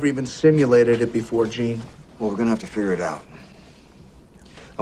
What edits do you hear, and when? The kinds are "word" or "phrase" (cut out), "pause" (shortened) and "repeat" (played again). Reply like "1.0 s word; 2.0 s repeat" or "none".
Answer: none